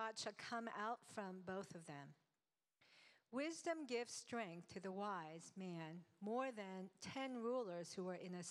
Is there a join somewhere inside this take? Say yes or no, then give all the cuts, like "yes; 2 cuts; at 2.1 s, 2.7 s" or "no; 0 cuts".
no; 0 cuts